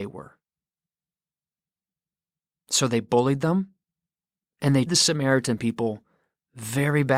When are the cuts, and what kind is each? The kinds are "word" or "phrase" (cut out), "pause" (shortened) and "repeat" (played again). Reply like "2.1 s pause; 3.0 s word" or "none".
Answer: 4.9 s word